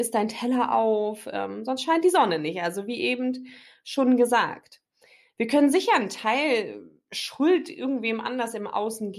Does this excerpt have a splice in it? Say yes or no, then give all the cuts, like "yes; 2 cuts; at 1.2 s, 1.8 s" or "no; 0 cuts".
no; 0 cuts